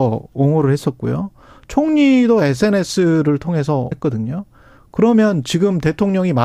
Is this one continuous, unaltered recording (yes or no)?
no